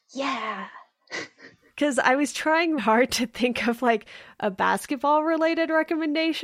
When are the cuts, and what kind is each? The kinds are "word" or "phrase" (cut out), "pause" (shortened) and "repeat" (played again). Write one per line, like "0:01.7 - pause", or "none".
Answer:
0:02.8 - word

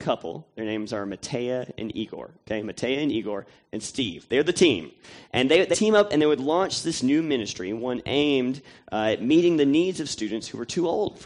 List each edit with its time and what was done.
0:05.7 - word

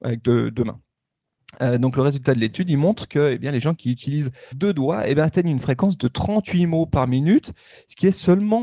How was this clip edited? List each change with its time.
0:04.5 - word

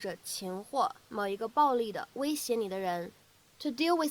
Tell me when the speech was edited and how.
none

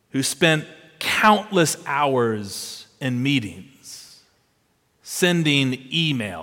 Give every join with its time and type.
none

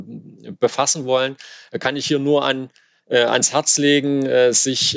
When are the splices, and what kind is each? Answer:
none

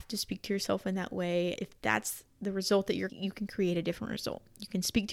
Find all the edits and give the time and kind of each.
0:01.6 - word
0:03.1 - word

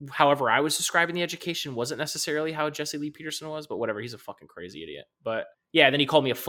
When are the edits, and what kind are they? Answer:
0:05.5 - pause

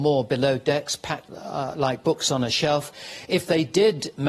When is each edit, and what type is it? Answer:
0:01.3 - word

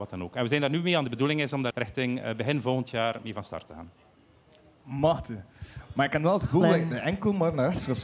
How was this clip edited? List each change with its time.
0:01.0 - phrase
0:01.7 - word

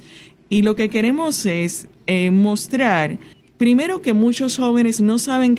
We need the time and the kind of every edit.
0:03.3 - pause

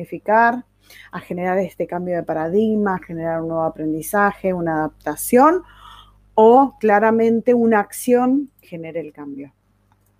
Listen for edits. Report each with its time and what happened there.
0:08.6 - word

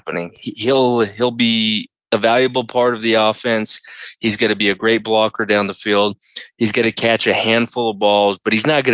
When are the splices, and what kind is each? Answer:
none

